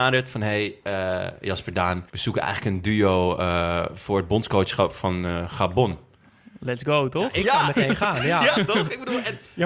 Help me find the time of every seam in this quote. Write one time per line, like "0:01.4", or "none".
0:02.1